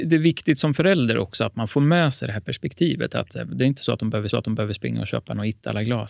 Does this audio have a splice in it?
yes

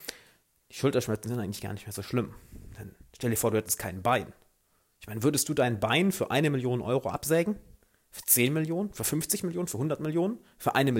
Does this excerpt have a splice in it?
no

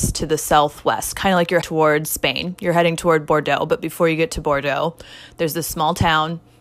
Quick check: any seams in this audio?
yes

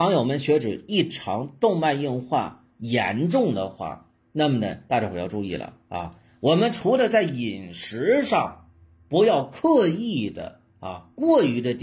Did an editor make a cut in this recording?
no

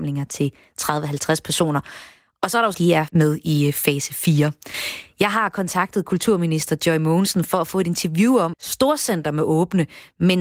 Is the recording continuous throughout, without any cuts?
no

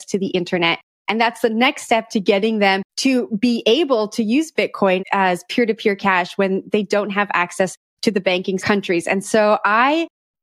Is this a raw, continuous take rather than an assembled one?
no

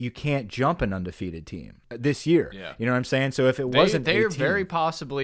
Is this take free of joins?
no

